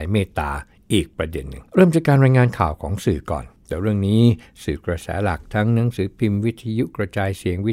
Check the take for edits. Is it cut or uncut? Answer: cut